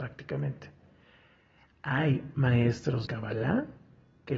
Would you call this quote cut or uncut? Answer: cut